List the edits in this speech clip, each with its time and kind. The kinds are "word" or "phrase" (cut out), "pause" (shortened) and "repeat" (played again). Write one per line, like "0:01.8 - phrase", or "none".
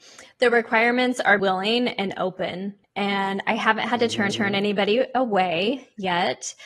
0:01.4 - word
0:02.8 - pause
0:04.3 - repeat